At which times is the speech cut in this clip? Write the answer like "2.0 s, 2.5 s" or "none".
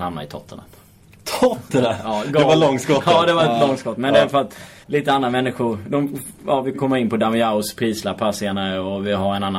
4.8 s, 6.7 s